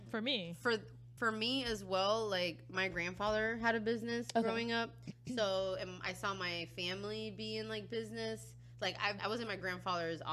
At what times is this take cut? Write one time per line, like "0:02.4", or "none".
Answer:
0:01.2
0:09.2